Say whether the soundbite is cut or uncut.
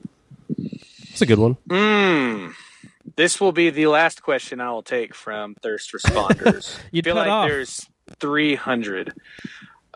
cut